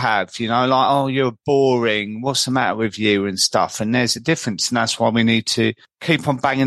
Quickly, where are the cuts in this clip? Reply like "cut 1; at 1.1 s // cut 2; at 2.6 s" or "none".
none